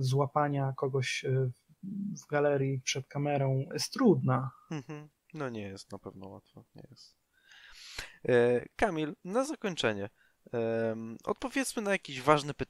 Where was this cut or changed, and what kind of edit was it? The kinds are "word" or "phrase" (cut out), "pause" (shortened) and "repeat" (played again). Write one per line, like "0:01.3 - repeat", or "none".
0:03.7 - word

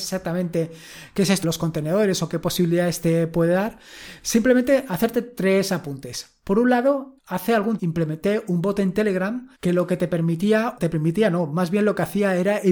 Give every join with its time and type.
0:01.4 - word
0:07.2 - word
0:07.8 - word
0:09.5 - pause
0:10.8 - phrase

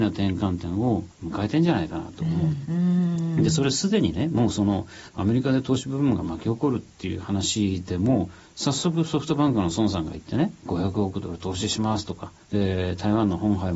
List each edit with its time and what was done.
0:01.1 - pause
0:02.7 - word
0:12.4 - pause

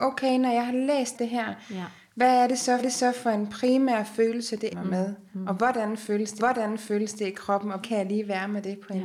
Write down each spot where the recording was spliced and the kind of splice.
0:01.1 - word
0:02.8 - repeat
0:04.7 - word
0:06.4 - repeat
0:07.8 - word

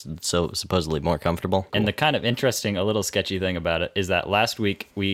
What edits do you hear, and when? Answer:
none

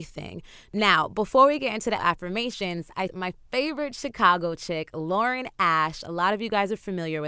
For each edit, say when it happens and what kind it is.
0:02.0 - word
0:03.1 - word

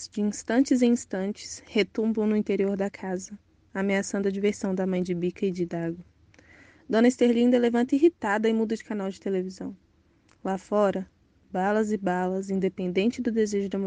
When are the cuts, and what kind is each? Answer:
none

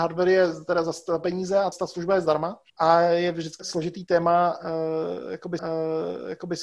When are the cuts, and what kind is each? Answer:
0:01.7 - word
0:02.7 - pause
0:03.6 - word
0:05.6 - repeat

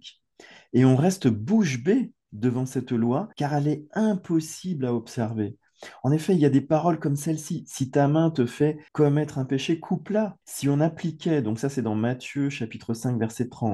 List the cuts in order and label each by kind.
0:03.3 - pause
0:08.9 - pause
0:10.4 - pause

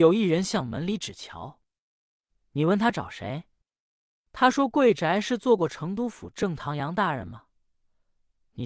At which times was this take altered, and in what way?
none

